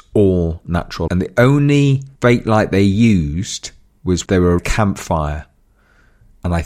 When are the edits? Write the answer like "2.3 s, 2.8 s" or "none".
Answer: 1.1 s, 2.2 s, 4.3 s, 4.6 s